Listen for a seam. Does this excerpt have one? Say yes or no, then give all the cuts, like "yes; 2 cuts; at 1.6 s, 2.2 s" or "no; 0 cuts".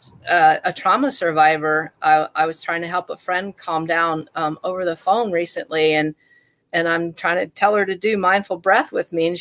no; 0 cuts